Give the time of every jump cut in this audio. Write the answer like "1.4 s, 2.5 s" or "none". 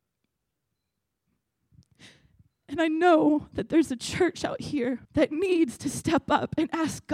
5.0 s